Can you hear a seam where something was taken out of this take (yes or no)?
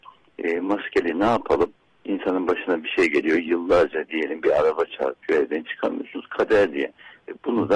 no